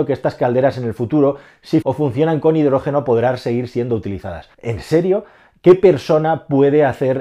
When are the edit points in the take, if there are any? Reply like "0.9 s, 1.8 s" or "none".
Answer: 1.8 s, 4.5 s